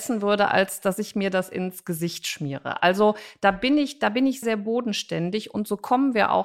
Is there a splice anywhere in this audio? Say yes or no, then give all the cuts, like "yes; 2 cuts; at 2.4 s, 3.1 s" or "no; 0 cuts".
yes; 1 cut; at 4.4 s